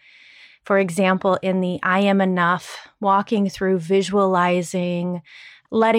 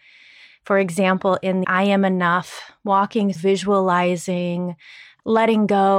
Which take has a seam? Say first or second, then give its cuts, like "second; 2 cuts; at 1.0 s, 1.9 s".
second; 2 cuts; at 1.6 s, 3.4 s